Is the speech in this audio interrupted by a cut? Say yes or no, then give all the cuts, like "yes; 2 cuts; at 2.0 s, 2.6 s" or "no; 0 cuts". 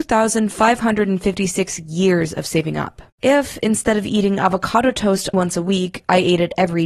yes; 2 cuts; at 3.1 s, 5.3 s